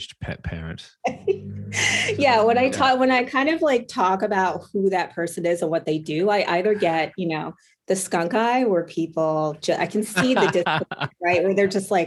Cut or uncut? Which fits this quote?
uncut